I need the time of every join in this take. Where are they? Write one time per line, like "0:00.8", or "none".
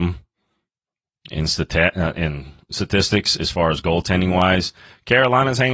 none